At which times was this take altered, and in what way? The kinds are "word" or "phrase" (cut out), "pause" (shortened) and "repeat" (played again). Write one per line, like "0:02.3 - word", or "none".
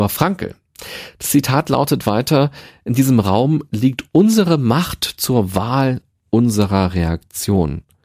none

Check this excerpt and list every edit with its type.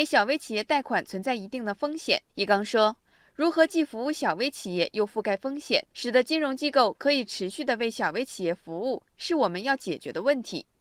0:02.3 - pause
0:05.9 - pause

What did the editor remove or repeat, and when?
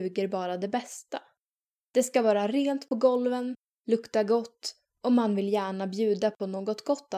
none

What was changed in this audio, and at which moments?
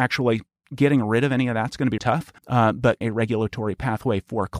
0:02.0 - word
0:02.4 - pause
0:03.0 - word

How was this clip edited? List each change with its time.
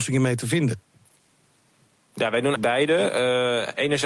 0:02.6 - word

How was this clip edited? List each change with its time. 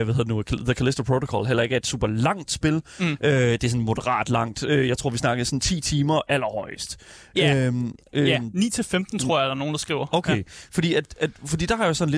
none

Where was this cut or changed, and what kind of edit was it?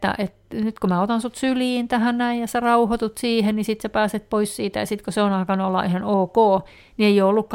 none

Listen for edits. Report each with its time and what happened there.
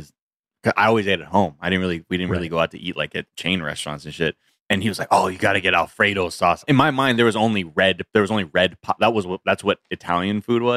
none

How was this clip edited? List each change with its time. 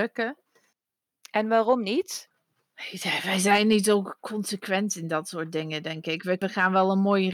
none

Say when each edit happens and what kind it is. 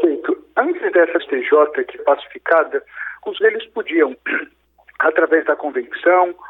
0:01.2 - phrase
0:02.0 - word
0:03.4 - word

